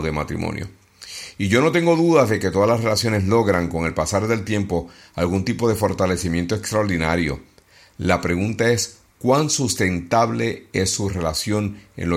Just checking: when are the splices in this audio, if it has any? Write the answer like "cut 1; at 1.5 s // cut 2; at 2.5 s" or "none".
none